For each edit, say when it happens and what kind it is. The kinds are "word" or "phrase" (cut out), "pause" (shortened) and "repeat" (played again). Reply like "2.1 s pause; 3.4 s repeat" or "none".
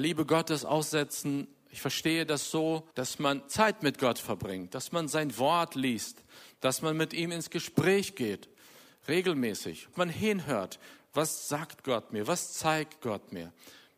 2.9 s pause; 9.9 s word